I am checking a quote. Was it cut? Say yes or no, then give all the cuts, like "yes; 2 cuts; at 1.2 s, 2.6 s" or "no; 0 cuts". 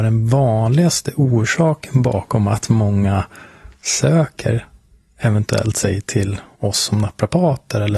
no; 0 cuts